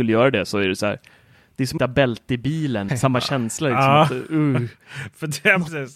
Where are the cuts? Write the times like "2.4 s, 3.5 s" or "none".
1.8 s, 2.9 s

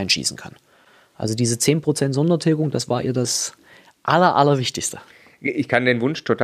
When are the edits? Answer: none

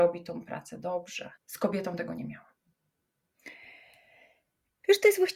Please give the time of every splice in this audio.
1.4 s

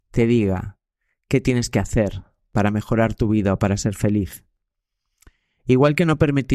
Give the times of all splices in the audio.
none

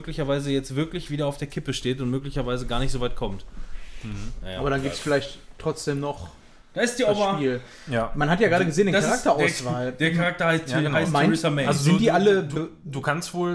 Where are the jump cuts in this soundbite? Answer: none

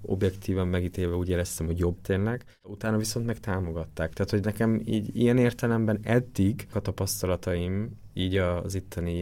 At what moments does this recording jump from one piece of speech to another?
2.0 s, 6.7 s

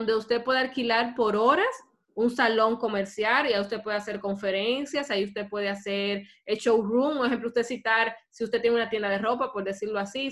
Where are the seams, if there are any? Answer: none

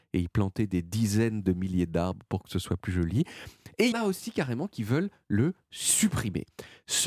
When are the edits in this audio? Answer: 3.9 s

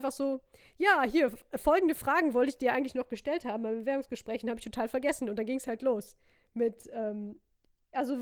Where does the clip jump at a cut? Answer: none

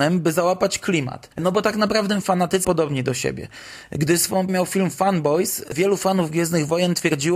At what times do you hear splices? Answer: 2.2 s, 2.6 s, 4.5 s

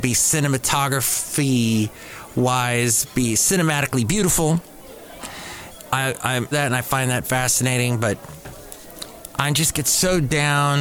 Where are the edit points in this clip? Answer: 6.5 s

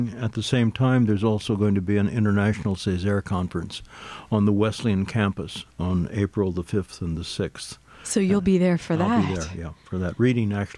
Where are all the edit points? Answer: 5.7 s

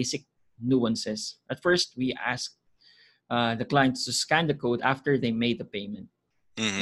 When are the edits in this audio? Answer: none

